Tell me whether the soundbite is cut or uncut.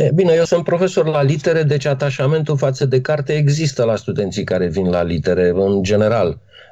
uncut